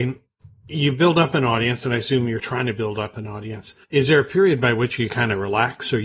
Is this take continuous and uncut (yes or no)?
no